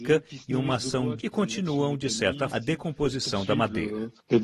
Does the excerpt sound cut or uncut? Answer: cut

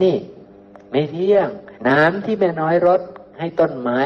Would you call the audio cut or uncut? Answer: cut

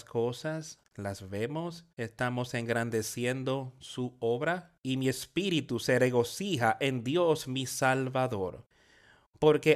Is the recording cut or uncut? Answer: cut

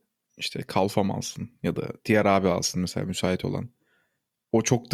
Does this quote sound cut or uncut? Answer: uncut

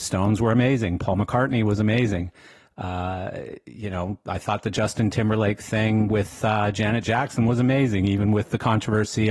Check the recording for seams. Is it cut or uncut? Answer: uncut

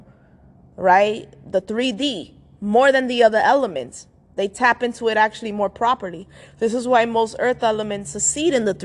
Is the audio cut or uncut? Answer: uncut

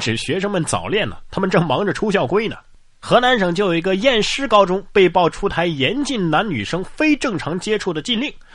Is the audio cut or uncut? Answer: uncut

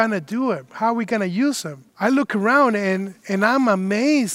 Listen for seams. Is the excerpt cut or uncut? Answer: cut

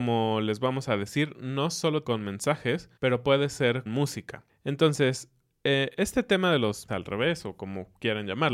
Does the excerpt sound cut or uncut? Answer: cut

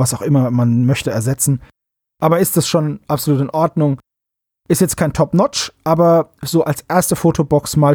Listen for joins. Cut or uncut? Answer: uncut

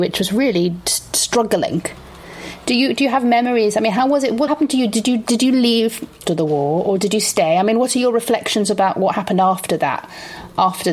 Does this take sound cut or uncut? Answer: cut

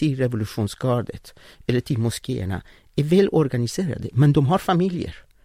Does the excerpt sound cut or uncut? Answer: uncut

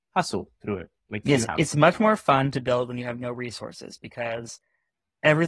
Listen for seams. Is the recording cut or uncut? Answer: cut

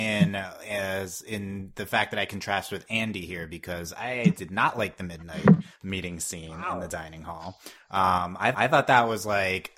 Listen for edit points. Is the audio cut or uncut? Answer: cut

